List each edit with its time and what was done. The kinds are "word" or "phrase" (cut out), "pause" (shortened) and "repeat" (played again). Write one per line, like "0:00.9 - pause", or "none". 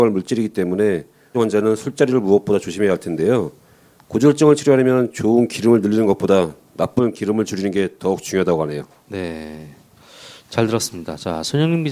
0:01.3 - word